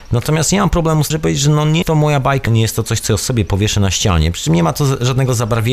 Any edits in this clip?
yes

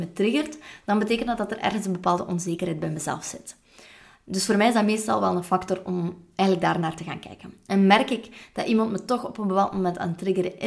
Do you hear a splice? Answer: no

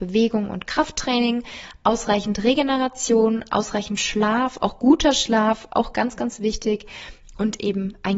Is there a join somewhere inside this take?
no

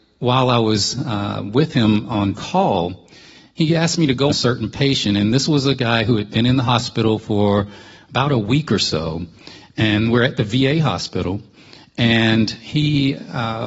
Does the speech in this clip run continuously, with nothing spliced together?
no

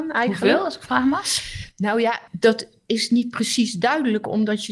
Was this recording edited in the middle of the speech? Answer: yes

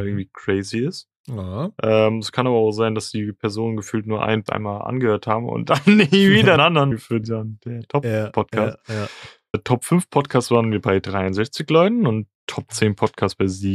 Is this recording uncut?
no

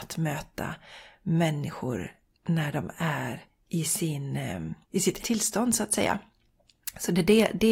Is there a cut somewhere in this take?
yes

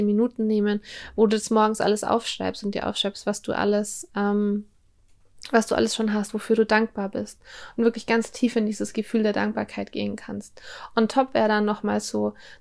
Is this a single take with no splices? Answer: yes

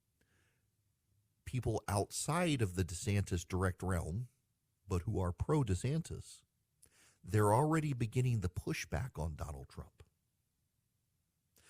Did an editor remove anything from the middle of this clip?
no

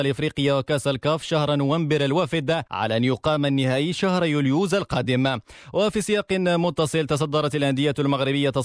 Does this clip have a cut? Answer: yes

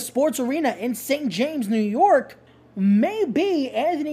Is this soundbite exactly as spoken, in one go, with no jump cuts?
no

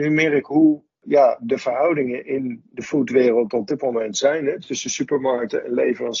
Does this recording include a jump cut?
no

